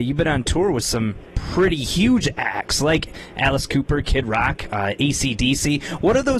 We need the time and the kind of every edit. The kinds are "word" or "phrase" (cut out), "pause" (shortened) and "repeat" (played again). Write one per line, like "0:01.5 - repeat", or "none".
none